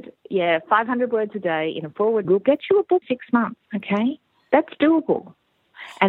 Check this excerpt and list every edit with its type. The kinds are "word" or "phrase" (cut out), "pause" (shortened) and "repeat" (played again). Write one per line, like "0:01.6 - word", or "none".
0:02.2 - word
0:03.0 - word
0:03.6 - pause